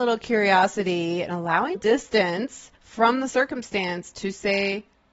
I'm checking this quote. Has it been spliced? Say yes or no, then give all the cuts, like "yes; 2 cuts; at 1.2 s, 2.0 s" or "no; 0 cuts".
yes; 2 cuts; at 1.7 s, 2.7 s